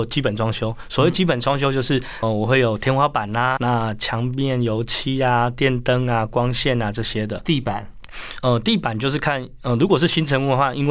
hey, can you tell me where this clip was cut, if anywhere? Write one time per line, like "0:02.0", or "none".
0:02.2
0:03.6